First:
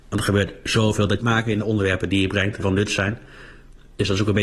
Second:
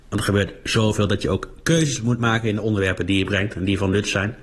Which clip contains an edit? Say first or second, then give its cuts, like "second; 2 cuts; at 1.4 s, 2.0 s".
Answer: first; 2 cuts; at 1.2 s, 2.6 s